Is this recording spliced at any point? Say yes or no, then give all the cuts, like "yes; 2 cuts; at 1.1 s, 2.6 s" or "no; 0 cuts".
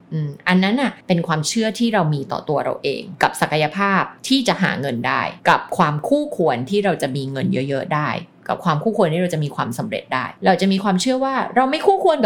yes; 1 cut; at 1.0 s